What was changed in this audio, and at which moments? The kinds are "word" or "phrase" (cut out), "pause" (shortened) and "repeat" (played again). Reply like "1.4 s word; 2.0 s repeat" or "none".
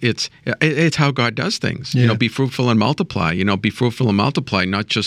none

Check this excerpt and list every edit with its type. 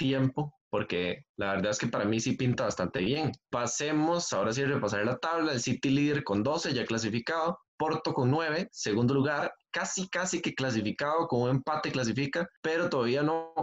7.6 s pause

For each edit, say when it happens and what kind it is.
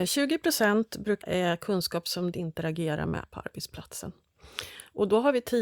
1.2 s phrase; 2.3 s phrase; 3.2 s word

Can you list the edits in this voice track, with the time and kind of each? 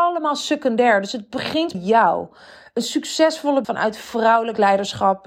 1.7 s word; 3.6 s word

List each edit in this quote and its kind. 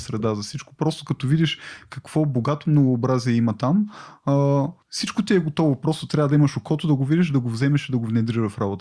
4.8 s pause

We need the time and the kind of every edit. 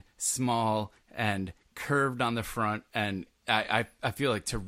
none

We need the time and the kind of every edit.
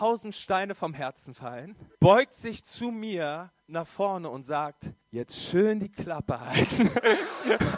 1.9 s pause; 5.0 s pause

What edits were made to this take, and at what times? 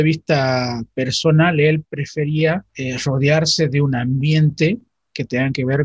2.7 s pause

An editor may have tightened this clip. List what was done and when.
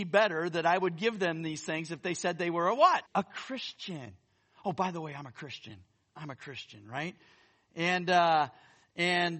3.1 s pause

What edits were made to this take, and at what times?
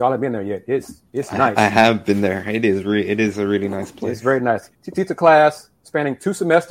1.1 s pause; 4.7 s pause

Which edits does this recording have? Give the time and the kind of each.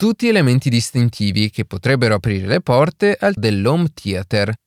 3.4 s word

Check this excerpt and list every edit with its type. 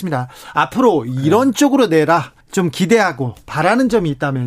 2.4 s pause

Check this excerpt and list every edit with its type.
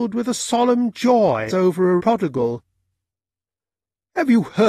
1.5 s word; 2.0 s word

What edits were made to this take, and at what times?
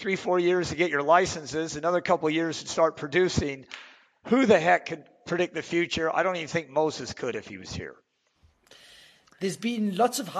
none

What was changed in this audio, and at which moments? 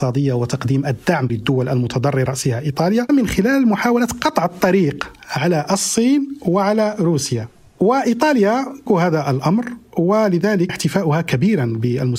1.3 s word; 2.3 s word; 3.1 s word; 8.9 s word; 10.7 s word

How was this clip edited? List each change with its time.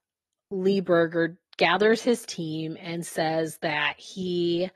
none

